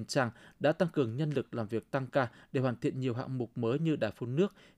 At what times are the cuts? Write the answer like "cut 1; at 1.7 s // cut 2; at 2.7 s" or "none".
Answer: none